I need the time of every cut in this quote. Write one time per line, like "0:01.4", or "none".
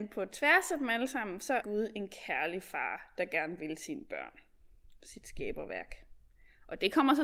0:01.6